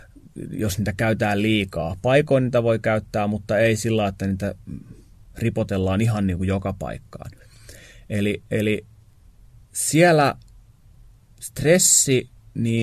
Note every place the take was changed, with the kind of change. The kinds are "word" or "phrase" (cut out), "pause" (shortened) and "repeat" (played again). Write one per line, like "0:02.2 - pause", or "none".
none

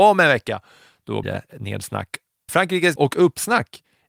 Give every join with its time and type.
0:01.2 - word
0:02.5 - word
0:03.0 - word

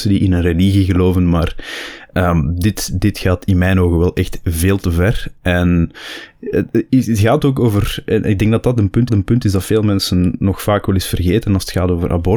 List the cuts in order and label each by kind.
0:09.1 - repeat

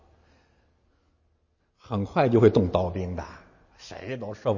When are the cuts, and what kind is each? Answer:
none

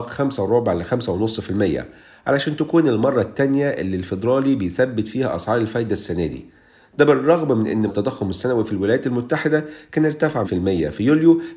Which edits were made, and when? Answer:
0:07.9 - word
0:10.4 - word

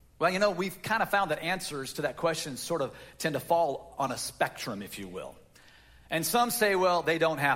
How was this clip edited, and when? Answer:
none

